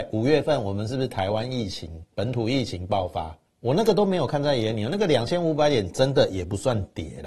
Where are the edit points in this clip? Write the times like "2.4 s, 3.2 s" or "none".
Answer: 2.1 s, 3.5 s